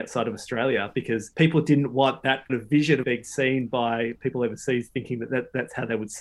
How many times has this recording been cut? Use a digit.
3